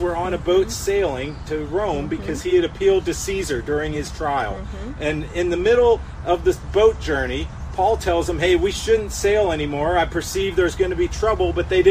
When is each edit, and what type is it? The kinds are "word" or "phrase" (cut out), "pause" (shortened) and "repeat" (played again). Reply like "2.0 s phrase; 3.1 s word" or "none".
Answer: none